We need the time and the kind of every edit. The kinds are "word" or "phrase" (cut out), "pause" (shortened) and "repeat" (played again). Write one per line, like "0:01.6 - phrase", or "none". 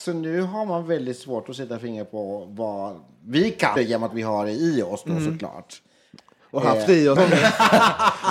0:03.8 - word
0:07.2 - word